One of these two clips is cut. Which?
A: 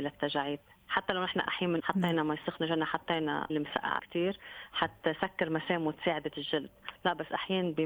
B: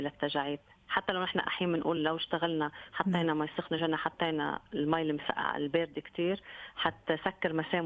A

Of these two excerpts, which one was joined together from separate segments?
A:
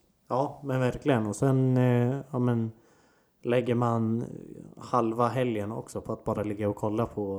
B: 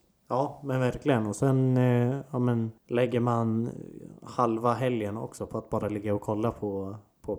B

